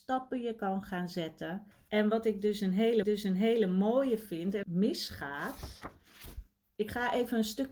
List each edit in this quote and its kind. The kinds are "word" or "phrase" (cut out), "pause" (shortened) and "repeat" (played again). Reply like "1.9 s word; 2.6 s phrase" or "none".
1.7 s pause; 3.0 s repeat; 4.6 s phrase